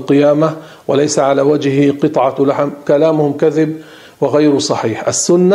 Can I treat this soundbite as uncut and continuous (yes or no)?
yes